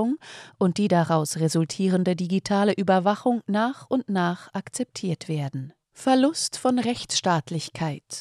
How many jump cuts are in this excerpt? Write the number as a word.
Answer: one